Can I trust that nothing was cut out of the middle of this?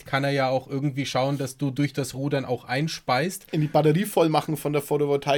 yes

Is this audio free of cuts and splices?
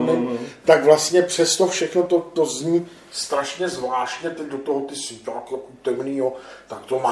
yes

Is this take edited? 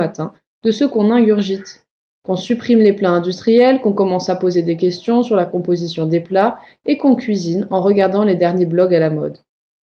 no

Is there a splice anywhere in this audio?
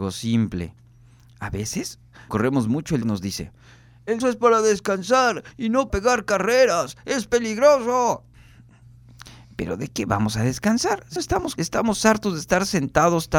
yes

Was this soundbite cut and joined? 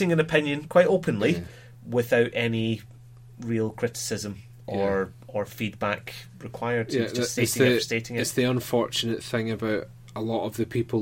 no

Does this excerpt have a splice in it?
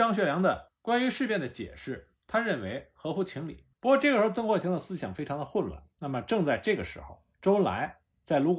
yes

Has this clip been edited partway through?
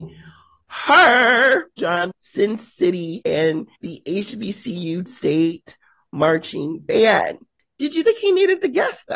yes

